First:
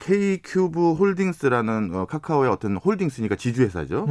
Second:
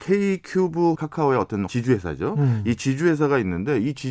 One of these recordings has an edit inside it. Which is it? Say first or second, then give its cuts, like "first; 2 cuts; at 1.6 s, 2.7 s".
second; 2 cuts; at 0.9 s, 1.7 s